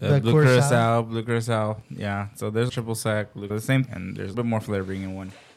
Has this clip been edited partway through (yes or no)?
yes